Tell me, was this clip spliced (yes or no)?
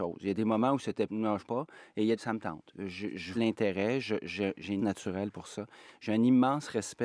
yes